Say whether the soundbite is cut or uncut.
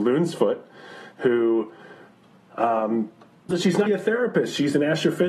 cut